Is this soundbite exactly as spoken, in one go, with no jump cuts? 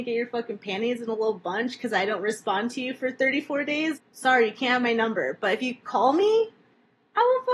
no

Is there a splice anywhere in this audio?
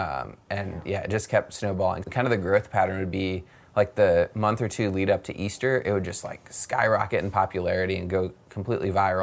yes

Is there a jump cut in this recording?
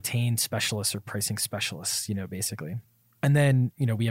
no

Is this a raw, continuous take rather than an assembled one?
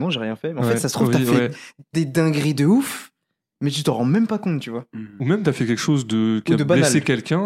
yes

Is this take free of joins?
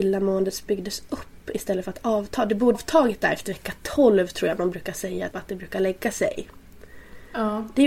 no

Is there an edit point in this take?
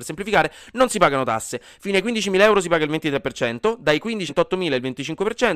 yes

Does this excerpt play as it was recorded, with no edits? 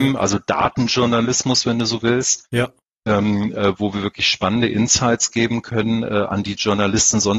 yes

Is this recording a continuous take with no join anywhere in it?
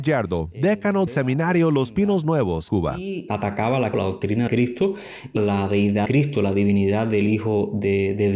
no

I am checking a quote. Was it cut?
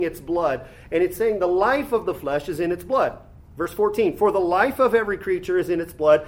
no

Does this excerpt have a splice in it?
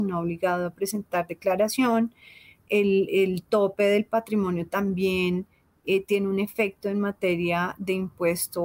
no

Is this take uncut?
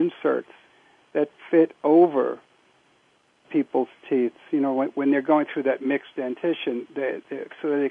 no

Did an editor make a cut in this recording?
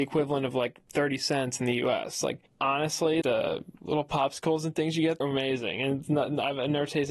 yes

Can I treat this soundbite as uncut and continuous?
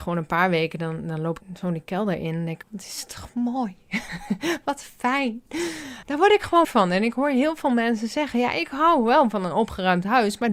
no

